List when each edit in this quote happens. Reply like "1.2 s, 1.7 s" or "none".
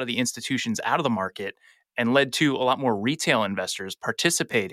none